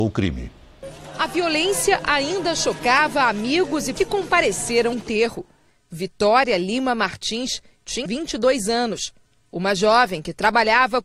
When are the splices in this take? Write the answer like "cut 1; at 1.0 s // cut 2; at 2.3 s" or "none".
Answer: cut 1; at 4.0 s // cut 2; at 4.9 s // cut 3; at 8.1 s